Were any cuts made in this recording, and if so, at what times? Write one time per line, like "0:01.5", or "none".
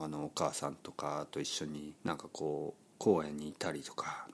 0:02.0